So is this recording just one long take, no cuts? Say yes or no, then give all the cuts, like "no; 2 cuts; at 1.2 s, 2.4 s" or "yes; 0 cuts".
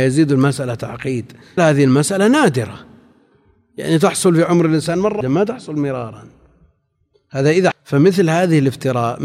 no; 3 cuts; at 1.6 s, 5.2 s, 7.7 s